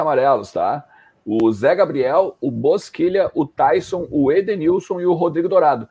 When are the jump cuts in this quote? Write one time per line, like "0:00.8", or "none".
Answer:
none